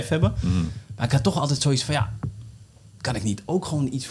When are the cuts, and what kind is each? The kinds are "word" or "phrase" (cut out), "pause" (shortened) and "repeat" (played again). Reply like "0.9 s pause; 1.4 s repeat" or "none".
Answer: none

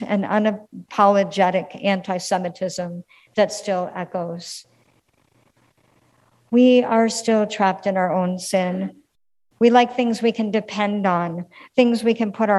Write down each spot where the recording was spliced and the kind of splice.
none

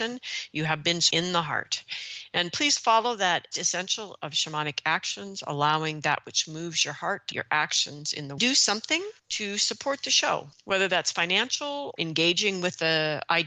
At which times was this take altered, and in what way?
1.1 s word; 3.5 s phrase; 7.3 s word; 8.4 s phrase; 9.2 s pause; 10.5 s pause; 12.0 s word

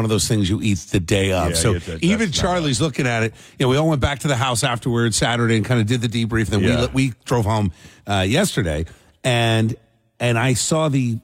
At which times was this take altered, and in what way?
none

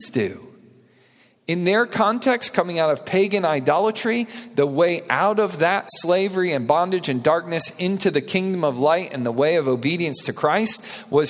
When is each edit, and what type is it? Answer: none

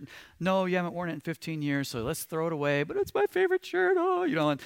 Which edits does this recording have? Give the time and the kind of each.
none

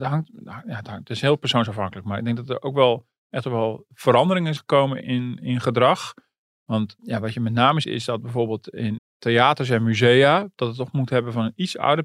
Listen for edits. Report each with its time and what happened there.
4.6 s word; 5.0 s word; 7.0 s word; 7.8 s word; 9.0 s word

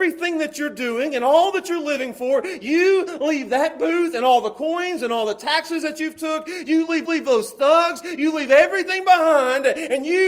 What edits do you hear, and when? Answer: 7.1 s repeat

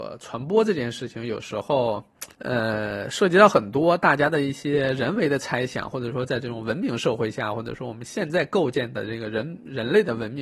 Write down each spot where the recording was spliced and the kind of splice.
2.3 s pause

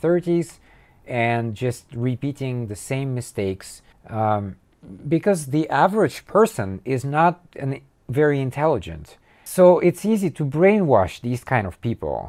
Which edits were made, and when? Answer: 3.9 s pause

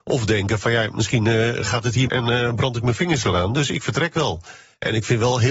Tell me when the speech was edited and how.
2.1 s word

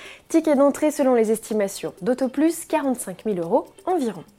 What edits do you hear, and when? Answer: none

